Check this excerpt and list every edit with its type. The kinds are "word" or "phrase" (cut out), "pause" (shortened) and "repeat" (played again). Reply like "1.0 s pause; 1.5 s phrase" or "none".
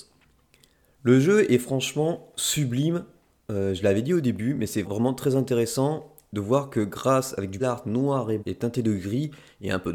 4.8 s word; 7.6 s word; 8.4 s word